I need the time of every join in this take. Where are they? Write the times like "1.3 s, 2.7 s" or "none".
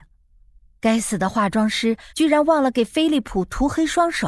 2.1 s